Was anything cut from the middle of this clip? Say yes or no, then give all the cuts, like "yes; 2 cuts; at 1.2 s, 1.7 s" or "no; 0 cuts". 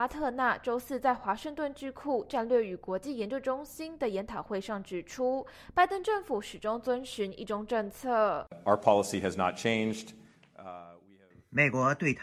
no; 0 cuts